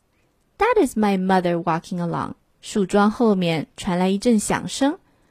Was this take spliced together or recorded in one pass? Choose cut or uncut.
cut